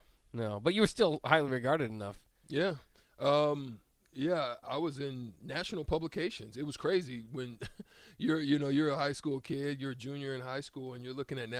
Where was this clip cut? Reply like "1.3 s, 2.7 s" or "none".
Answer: none